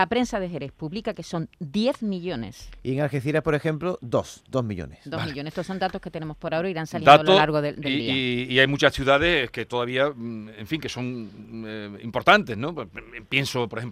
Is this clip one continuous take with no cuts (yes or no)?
yes